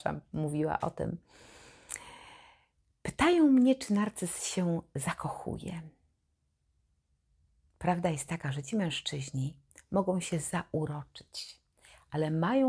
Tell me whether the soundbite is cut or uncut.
uncut